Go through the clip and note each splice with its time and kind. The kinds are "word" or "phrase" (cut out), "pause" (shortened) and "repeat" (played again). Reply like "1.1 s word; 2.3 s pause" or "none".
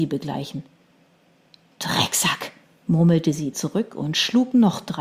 3.5 s word